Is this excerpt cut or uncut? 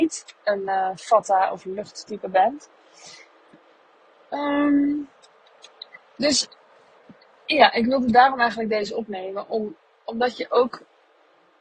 uncut